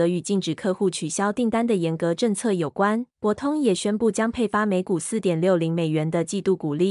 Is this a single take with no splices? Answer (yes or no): no